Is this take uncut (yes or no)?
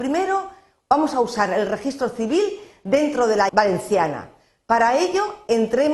no